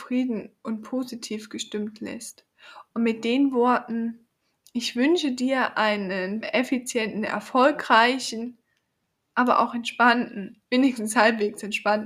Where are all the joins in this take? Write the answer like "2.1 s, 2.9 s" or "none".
6.4 s

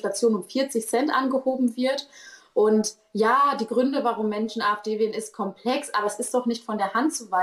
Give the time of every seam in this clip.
none

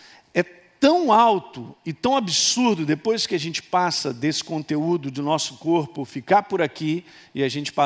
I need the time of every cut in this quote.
none

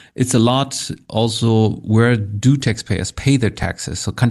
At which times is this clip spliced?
none

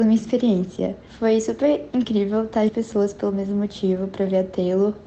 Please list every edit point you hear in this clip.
2.7 s

